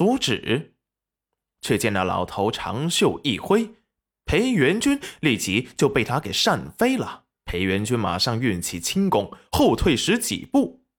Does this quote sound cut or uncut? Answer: cut